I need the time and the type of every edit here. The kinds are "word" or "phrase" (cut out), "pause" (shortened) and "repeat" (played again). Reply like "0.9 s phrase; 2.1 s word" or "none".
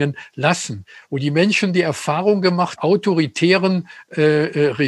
2.8 s phrase